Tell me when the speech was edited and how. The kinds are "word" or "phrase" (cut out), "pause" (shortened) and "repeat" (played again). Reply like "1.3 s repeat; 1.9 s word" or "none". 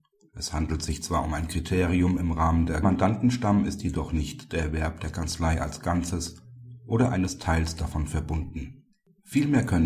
2.8 s phrase